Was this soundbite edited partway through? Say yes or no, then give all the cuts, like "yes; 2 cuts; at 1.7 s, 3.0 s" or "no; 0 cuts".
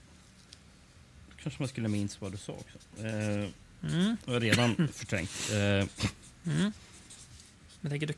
no; 0 cuts